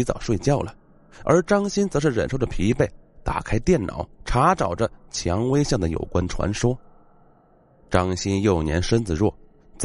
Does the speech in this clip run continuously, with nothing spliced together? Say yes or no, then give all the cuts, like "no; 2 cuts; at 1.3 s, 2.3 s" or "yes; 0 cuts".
no; 1 cut; at 4.1 s